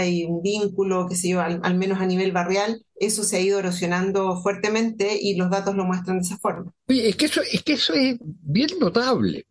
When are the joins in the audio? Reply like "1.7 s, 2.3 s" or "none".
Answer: 2.9 s

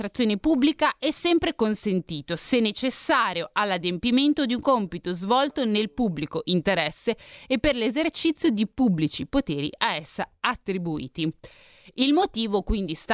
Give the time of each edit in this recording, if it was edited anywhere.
none

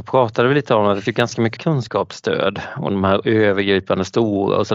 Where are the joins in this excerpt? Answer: 1.1 s, 1.6 s, 2.9 s

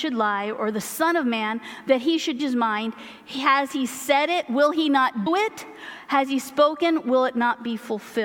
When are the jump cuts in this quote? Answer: 2.4 s, 5.3 s

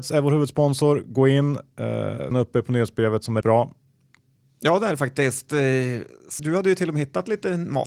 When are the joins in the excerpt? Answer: 2.3 s, 3.4 s, 6.4 s

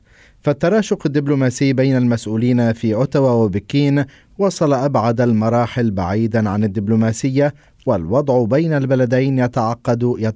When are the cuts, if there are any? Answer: none

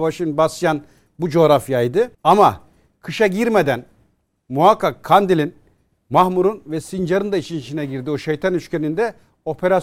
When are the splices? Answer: 2.1 s

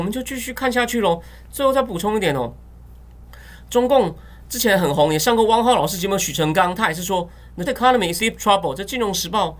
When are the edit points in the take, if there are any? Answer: 7.7 s, 8.2 s

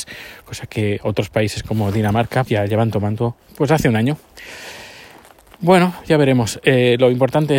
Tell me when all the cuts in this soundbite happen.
2.5 s

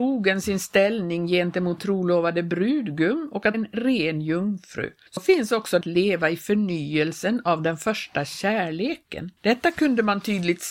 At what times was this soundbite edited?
1.8 s, 3.5 s, 5.1 s, 5.8 s, 9.4 s

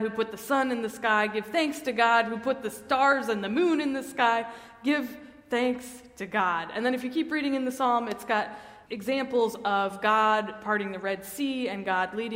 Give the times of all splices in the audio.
8.8 s

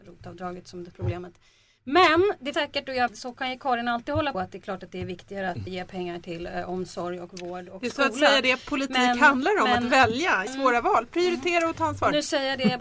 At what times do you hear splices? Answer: 0.9 s, 2.5 s, 3.1 s, 4.3 s, 5.7 s, 10.5 s

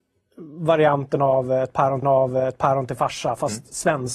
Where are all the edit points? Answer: 2.0 s

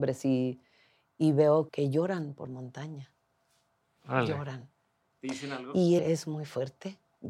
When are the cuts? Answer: 1.7 s, 2.5 s, 6.0 s

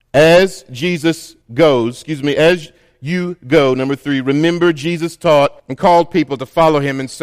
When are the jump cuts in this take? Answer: 1.4 s, 5.6 s

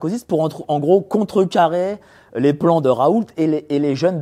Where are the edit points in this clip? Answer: none

